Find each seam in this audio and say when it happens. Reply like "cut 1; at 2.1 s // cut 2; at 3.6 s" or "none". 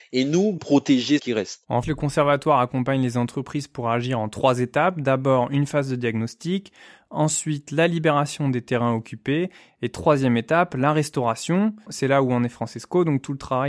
cut 1; at 1.2 s // cut 2; at 1.8 s